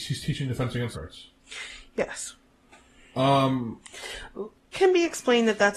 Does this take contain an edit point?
yes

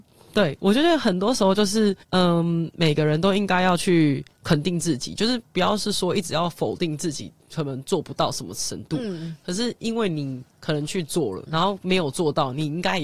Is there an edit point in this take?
yes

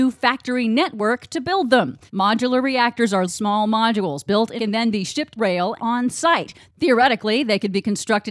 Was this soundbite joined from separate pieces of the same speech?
yes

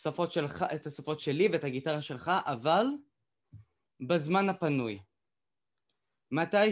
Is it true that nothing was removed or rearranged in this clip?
yes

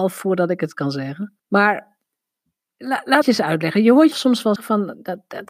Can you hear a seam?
yes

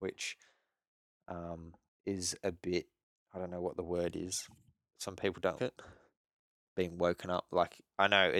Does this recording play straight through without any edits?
no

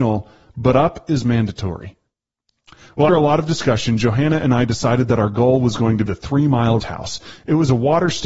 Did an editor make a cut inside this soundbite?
yes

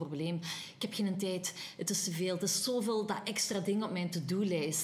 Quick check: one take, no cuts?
yes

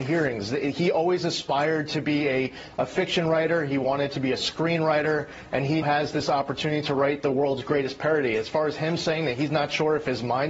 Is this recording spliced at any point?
yes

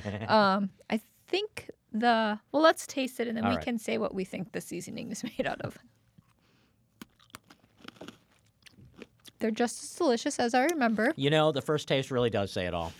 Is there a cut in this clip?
no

